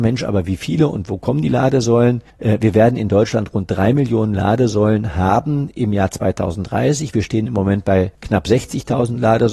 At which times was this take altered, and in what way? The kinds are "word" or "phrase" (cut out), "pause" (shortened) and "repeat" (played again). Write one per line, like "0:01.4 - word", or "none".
0:02.3 - pause
0:08.1 - pause